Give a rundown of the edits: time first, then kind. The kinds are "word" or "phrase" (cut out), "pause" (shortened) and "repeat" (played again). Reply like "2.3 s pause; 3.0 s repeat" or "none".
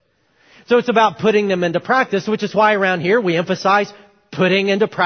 none

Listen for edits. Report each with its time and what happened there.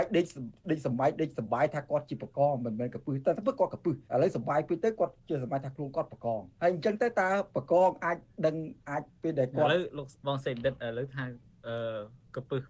4.0 s pause; 6.5 s pause; 8.8 s pause; 10.2 s pause

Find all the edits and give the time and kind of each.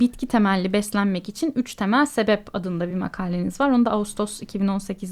none

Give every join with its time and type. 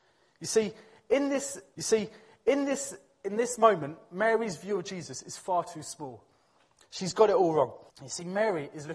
1.7 s repeat; 7.9 s pause

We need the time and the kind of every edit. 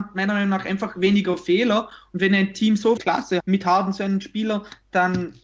3.0 s phrase; 3.4 s word

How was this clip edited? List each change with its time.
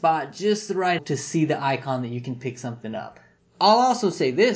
1.0 s word

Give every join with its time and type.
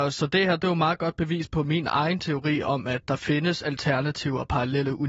none

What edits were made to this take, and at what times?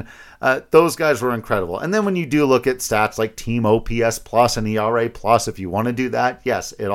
none

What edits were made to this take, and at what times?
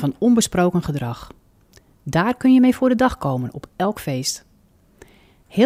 none

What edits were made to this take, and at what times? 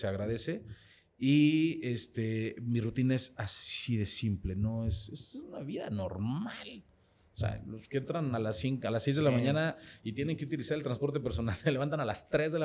none

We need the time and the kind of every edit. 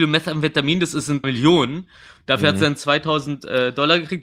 1.2 s phrase

